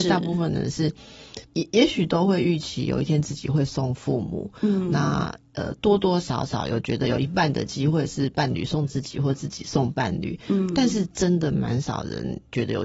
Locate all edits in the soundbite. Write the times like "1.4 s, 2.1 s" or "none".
1.4 s